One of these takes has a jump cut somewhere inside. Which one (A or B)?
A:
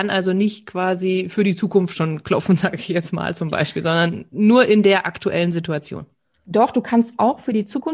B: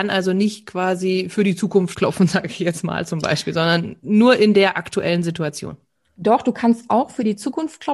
B